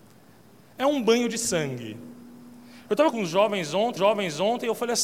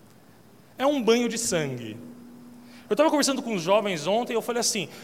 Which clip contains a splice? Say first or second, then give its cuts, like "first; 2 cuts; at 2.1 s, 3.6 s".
first; 2 cuts; at 3.1 s, 4.0 s